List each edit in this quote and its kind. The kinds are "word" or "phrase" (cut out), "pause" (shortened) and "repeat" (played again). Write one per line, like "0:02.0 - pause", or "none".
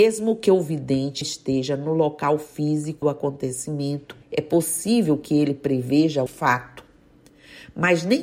0:01.2 - word
0:03.0 - word
0:04.2 - pause
0:06.3 - word